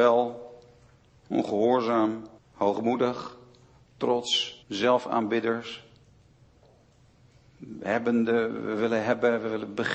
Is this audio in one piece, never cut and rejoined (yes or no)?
no